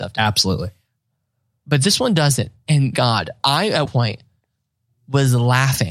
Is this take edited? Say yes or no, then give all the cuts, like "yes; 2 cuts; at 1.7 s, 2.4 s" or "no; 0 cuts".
yes; 3 cuts; at 2.9 s, 3.4 s, 3.9 s